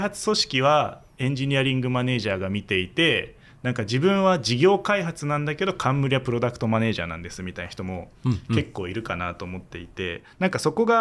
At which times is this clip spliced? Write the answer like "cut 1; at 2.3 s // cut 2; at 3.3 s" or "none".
none